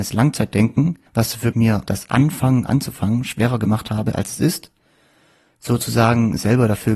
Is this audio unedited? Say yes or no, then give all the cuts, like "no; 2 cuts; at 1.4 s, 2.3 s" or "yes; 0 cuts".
no; 3 cuts; at 1.1 s, 1.5 s, 1.9 s